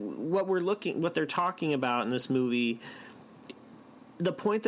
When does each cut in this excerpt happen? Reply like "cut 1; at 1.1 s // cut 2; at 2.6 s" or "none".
none

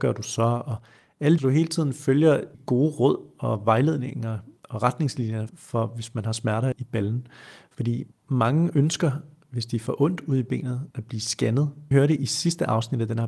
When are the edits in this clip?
cut 1; at 1.4 s // cut 2; at 2.5 s // cut 3; at 4.6 s // cut 4; at 5.5 s // cut 5; at 6.7 s // cut 6; at 8.1 s // cut 7; at 10.9 s // cut 8; at 11.9 s

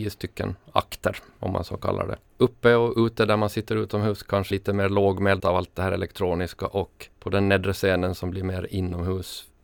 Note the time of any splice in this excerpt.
cut 1; at 2.3 s // cut 2; at 4.5 s // cut 3; at 5.4 s // cut 4; at 7.1 s

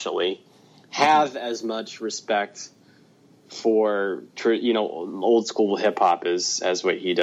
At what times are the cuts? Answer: none

